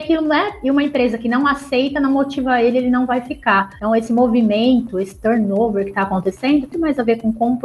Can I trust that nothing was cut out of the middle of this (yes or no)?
no